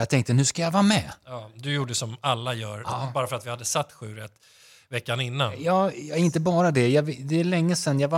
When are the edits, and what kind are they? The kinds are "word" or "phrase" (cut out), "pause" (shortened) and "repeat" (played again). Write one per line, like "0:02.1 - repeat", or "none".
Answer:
none